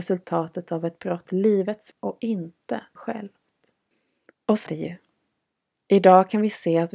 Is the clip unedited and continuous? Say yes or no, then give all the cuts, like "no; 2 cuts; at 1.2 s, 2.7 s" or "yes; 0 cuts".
no; 4 cuts; at 1.3 s, 1.9 s, 3.0 s, 4.7 s